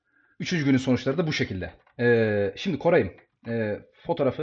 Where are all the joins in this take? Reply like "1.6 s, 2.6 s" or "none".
none

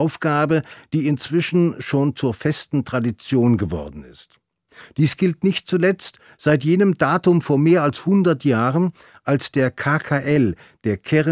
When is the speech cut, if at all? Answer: none

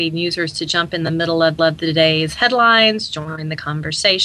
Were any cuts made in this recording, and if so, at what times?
1.6 s

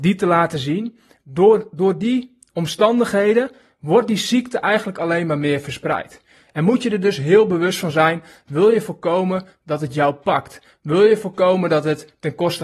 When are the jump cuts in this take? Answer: none

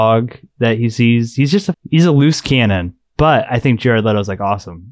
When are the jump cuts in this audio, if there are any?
1.7 s

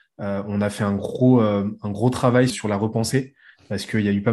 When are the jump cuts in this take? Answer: 2.5 s

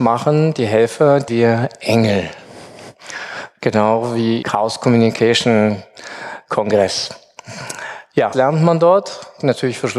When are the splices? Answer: 1.3 s, 4.4 s, 8.3 s

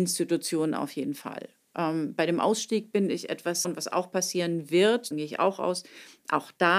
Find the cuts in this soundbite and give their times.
3.6 s, 5.1 s

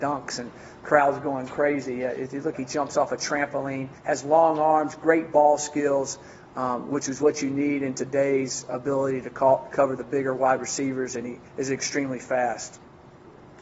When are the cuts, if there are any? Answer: 2.5 s, 4.0 s, 11.5 s

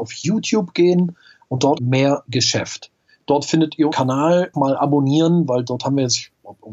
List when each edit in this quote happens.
1.8 s, 3.9 s, 4.5 s

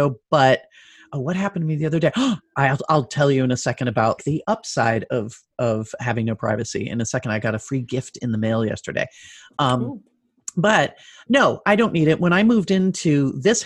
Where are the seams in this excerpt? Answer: 4.2 s

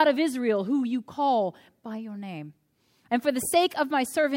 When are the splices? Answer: none

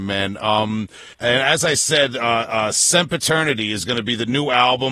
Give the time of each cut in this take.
1.1 s

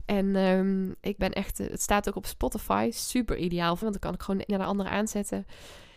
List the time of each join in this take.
1.2 s, 3.8 s, 4.5 s

